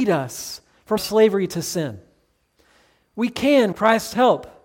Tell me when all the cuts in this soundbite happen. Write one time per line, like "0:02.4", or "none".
0:01.0
0:03.7